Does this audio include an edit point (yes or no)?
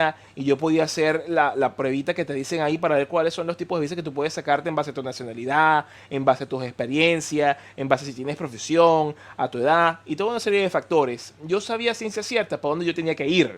no